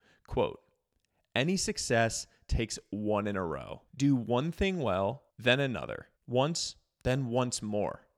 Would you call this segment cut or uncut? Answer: cut